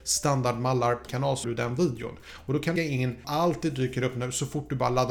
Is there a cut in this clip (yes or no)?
yes